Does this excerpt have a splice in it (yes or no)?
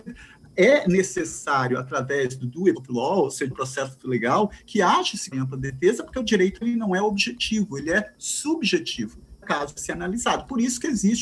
yes